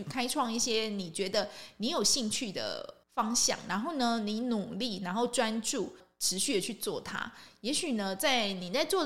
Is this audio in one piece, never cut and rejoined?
no; 1 cut; at 3.0 s

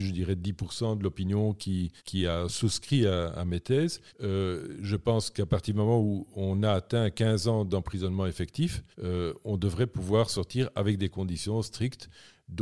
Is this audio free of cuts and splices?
no; 3 cuts; at 2.0 s, 4.1 s, 8.9 s

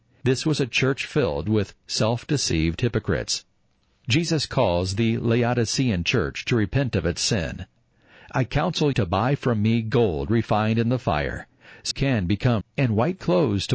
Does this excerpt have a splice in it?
yes; 3 cuts; at 8.9 s, 11.9 s, 12.6 s

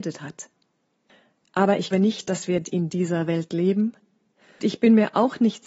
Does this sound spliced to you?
yes; 3 cuts; at 1.9 s, 2.6 s, 4.6 s

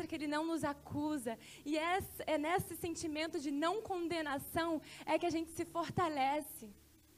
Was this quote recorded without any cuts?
yes; 0 cuts

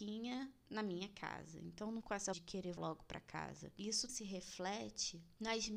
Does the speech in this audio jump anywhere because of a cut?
yes; 4 cuts; at 2.0 s, 2.3 s, 2.8 s, 4.1 s

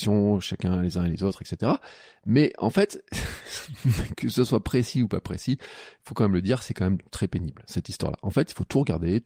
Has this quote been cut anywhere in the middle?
no; 0 cuts

